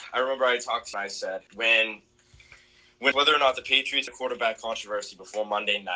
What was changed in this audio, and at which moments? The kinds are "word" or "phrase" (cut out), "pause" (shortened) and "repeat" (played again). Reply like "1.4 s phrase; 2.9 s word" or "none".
0.9 s phrase; 1.5 s pause; 3.1 s word; 4.1 s word